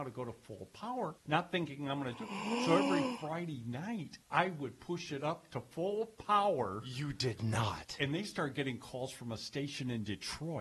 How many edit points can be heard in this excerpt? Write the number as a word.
two